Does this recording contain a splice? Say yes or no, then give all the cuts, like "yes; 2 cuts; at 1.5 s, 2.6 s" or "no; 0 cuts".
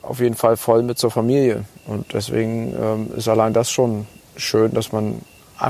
no; 0 cuts